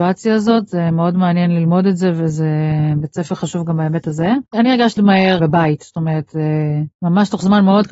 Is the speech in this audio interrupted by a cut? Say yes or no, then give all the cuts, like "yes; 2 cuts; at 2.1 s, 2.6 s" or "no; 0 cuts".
yes; 4 cuts; at 4.5 s, 5.0 s, 5.4 s, 6.9 s